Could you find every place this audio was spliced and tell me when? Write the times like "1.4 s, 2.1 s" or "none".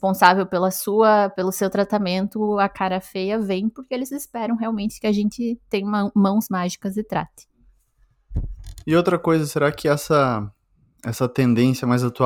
none